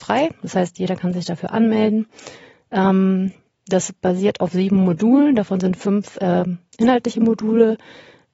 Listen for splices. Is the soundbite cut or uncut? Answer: uncut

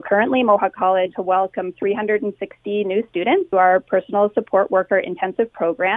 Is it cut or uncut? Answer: cut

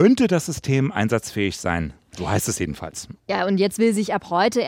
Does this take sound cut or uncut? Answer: uncut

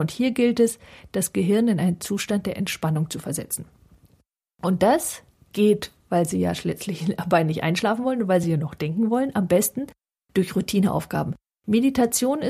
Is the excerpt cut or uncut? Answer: uncut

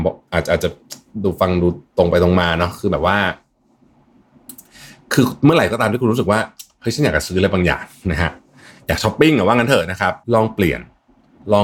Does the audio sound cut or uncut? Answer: cut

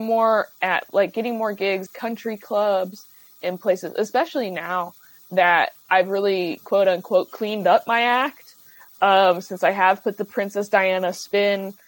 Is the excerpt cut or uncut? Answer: cut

